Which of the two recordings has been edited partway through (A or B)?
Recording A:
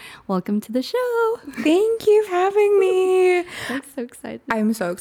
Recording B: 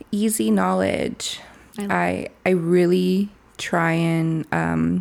A